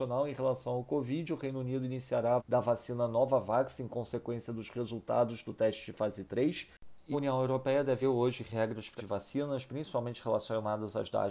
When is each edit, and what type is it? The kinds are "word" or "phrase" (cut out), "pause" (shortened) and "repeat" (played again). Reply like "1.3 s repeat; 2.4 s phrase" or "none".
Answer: 2.4 s word; 7.1 s word; 8.0 s word; 9.0 s word